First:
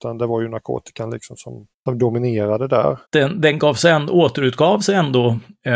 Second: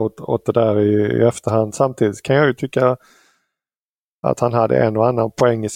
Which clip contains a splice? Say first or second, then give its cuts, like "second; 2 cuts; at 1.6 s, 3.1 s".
first; 2 cuts; at 1.7 s, 3.1 s